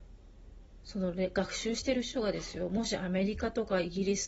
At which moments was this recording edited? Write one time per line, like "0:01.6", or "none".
none